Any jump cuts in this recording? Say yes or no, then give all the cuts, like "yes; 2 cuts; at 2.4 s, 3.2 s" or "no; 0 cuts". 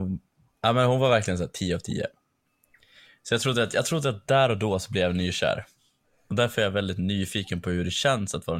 no; 0 cuts